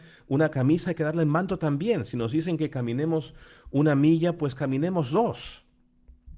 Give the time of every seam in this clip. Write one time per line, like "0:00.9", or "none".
none